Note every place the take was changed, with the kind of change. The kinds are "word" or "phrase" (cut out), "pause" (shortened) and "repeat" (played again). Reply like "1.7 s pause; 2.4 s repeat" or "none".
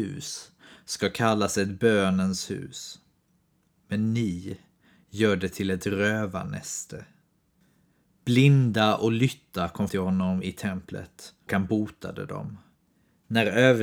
9.9 s word; 11.5 s word